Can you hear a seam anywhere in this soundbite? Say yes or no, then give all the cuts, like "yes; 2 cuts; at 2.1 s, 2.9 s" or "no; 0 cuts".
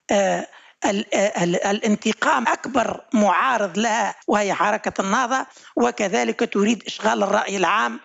yes; 2 cuts; at 2.4 s, 4.2 s